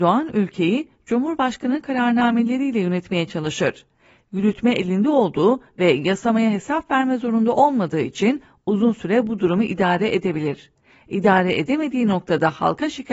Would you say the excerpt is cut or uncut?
uncut